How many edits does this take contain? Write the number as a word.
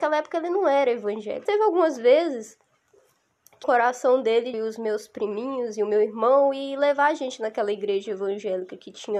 three